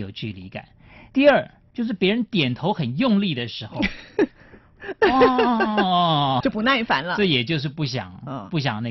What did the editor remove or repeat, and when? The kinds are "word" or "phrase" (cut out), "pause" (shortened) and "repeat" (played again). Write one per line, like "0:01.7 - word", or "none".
0:06.4 - word